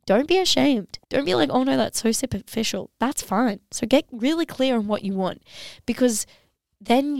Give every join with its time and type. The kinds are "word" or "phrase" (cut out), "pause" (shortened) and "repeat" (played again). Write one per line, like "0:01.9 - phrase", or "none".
0:01.0 - pause